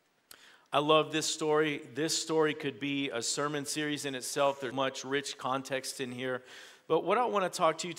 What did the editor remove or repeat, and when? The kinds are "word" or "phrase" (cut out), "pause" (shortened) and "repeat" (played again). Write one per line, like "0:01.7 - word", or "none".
0:04.7 - word